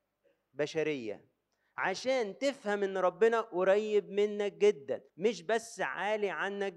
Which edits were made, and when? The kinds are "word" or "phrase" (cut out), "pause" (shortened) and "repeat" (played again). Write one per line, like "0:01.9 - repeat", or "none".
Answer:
0:01.5 - pause
0:05.1 - pause